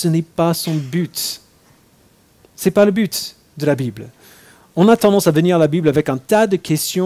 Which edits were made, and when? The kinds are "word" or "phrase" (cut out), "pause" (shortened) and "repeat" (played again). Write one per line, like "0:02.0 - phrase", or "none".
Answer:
none